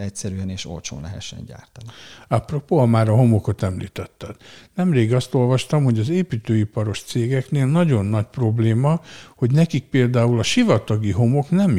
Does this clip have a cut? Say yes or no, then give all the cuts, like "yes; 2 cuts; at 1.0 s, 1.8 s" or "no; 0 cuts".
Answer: no; 0 cuts